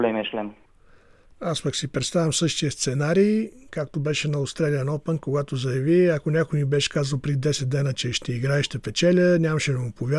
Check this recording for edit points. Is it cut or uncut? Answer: uncut